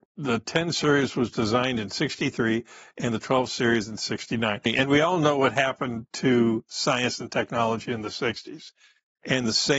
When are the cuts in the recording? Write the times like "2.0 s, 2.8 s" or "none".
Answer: none

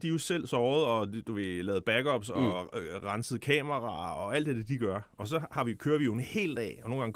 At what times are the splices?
none

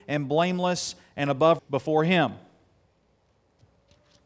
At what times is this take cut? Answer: 1.6 s

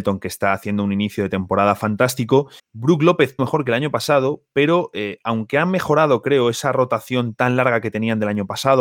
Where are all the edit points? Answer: 2.6 s, 3.4 s

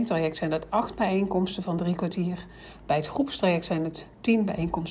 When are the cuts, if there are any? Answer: none

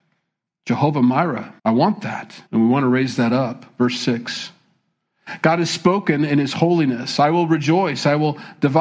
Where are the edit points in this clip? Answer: 1.6 s, 2.5 s

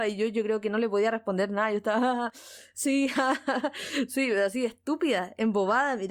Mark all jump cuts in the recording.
none

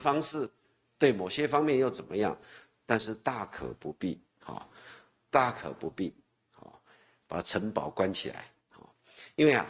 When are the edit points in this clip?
4.3 s, 6.5 s, 8.6 s

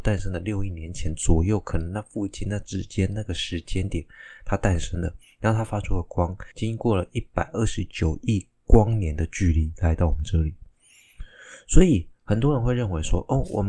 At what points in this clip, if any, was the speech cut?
6.5 s

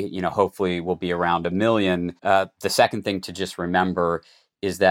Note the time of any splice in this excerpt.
2.2 s

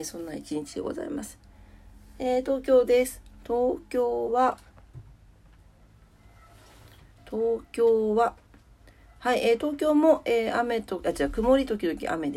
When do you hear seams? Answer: none

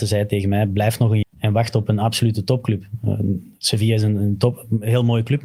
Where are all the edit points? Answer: 1.2 s

